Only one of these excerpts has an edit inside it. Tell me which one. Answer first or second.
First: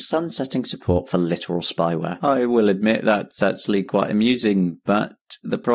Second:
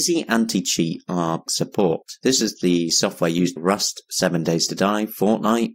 second